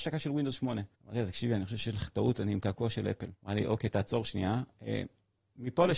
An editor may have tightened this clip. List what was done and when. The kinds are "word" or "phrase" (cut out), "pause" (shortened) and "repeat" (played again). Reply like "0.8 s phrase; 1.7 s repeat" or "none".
0.9 s pause; 3.4 s pause